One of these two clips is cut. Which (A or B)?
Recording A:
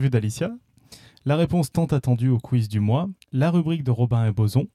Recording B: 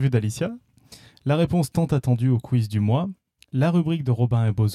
A